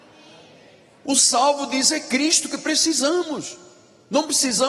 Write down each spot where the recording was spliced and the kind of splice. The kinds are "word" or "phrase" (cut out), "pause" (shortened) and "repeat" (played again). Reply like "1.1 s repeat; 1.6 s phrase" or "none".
none

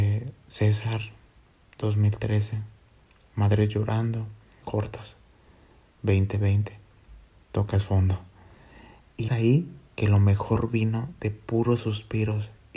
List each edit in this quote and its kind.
4.6 s word; 9.3 s word

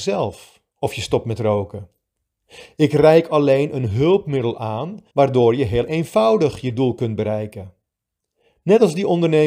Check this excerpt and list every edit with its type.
5.1 s pause

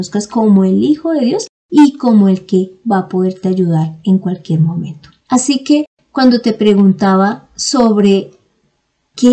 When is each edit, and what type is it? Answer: 5.2 s pause

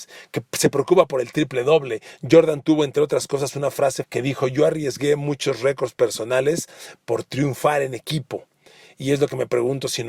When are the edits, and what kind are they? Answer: 4.0 s word

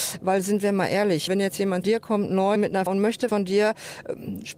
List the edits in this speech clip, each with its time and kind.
1.3 s word; 1.8 s word; 2.6 s word; 2.9 s word; 3.3 s word

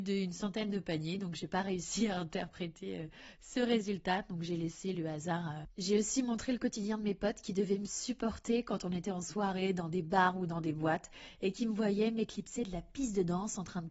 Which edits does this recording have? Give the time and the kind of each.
none

